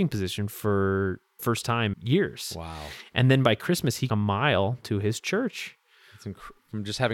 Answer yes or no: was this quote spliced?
yes